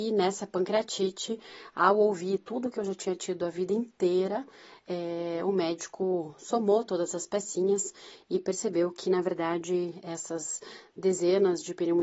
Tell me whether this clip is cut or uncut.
uncut